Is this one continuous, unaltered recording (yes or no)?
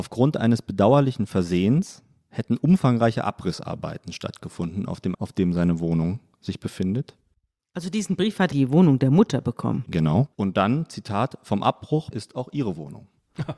no